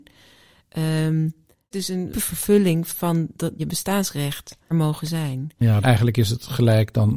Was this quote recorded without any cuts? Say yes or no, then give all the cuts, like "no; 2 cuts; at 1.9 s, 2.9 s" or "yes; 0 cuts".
no; 5 cuts; at 1.7 s, 2.1 s, 3.6 s, 4.7 s, 5.8 s